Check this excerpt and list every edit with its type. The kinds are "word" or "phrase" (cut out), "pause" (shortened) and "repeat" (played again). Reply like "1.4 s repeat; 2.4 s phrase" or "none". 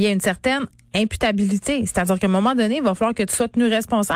none